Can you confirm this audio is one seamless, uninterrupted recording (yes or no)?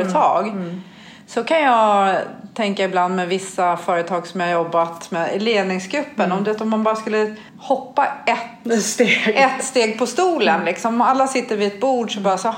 no